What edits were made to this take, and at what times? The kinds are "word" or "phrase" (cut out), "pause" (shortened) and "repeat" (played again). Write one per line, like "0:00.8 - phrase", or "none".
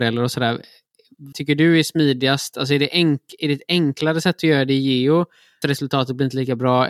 0:01.3 - word
0:05.6 - word

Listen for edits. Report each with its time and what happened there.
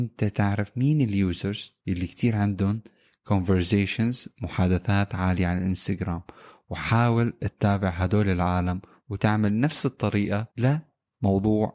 0:01.8 - pause
0:10.5 - pause

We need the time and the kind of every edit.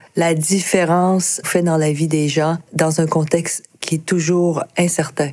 0:01.4 - word

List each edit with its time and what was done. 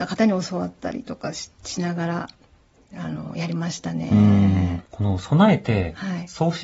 0:04.8 - pause

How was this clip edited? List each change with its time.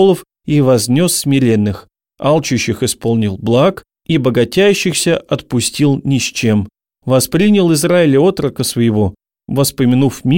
none

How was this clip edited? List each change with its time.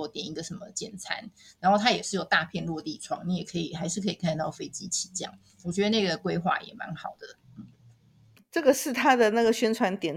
none

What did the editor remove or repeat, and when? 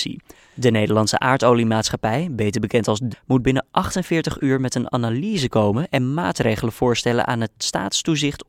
0:03.1 - word

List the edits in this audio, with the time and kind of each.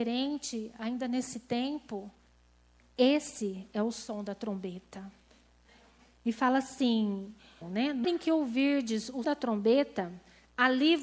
0:07.6 - word
0:08.0 - word
0:09.2 - word

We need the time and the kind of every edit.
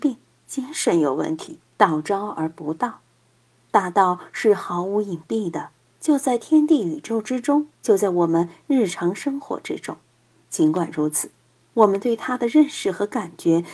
0:01.7 - pause
0:07.7 - pause

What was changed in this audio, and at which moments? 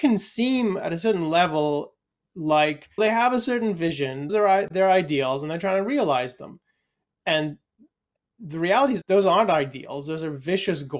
0:03.0 - word
0:04.3 - word
0:09.0 - word

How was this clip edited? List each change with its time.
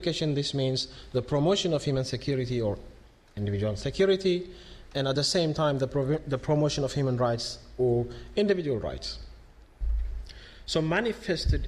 none

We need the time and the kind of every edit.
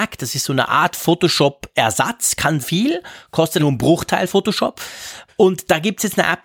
0:02.6 - word
0:03.6 - word
0:04.3 - word

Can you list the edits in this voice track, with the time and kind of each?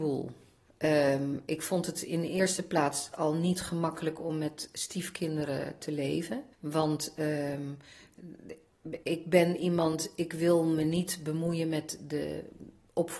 0:06.5 - pause
0:09.0 - word

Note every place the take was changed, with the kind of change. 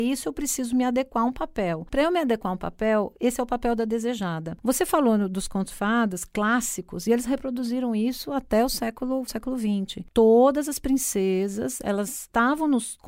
0:05.7 - word
0:09.3 - word

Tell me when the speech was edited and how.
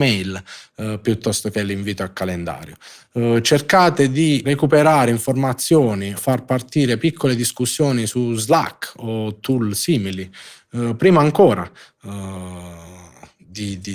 0:04.4 - word
0:06.2 - word

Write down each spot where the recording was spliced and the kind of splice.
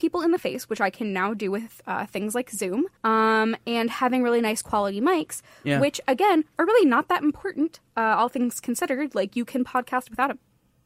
0:03.0 - pause

